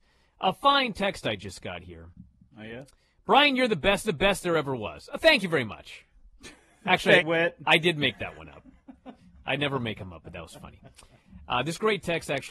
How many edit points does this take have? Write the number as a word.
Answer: two